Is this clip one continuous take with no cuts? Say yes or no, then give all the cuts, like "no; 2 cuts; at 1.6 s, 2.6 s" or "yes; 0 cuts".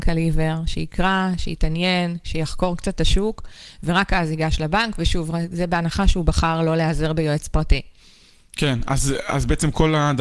yes; 0 cuts